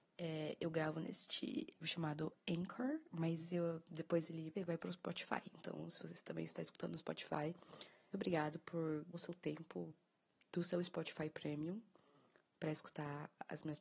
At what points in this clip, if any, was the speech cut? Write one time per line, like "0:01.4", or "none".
0:01.8
0:04.5
0:08.1
0:09.1